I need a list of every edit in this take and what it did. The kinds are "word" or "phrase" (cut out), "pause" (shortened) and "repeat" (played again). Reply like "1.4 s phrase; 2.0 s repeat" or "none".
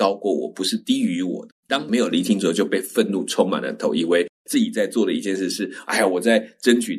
1.6 s pause